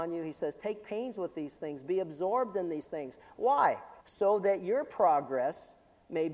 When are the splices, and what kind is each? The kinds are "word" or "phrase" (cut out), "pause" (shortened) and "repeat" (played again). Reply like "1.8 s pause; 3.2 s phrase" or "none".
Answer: 4.0 s pause